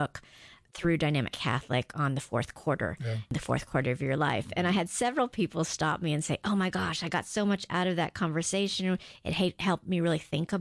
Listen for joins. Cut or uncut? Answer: uncut